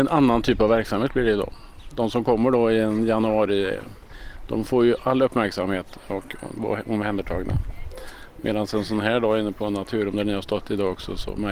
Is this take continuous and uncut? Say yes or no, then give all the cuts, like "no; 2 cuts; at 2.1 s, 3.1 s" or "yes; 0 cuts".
yes; 0 cuts